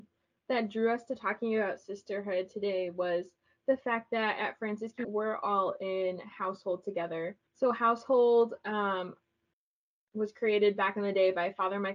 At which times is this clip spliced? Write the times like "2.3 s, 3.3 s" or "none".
5.0 s, 7.5 s